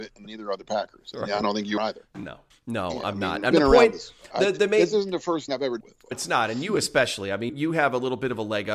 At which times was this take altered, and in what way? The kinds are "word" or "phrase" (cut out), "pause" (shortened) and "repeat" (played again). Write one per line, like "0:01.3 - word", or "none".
0:01.8 - word
0:03.5 - word
0:05.5 - word
0:05.8 - word
0:06.1 - word
0:07.5 - word